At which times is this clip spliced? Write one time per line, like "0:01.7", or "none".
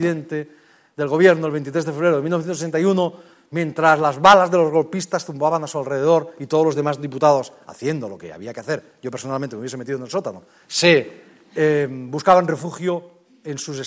none